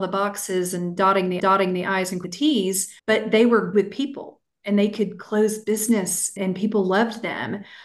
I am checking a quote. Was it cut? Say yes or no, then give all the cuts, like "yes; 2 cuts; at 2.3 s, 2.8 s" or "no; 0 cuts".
yes; 5 cuts; at 1.4 s, 2.2 s, 3.0 s, 3.7 s, 6.4 s